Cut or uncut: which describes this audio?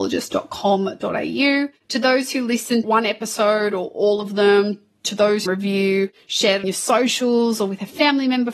cut